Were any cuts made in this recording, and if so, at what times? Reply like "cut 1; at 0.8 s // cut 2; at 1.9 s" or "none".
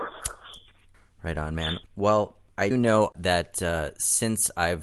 cut 1; at 0.9 s // cut 2; at 1.9 s // cut 3; at 2.7 s